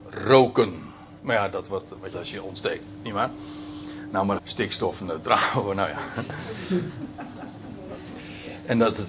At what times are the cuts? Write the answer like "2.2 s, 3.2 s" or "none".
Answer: 1.2 s, 1.7 s, 2.1 s, 4.4 s